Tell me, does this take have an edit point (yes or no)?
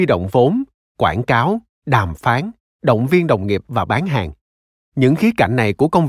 no